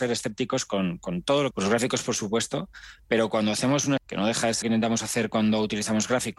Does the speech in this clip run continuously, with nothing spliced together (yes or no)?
no